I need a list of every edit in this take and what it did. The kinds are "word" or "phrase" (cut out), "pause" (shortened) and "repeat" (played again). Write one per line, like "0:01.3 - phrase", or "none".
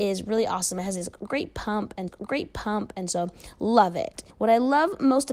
0:02.1 - repeat
0:04.3 - pause